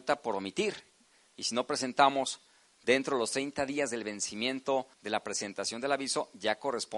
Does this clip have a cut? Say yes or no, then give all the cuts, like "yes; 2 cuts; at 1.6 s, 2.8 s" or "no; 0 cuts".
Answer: yes; 1 cut; at 4.9 s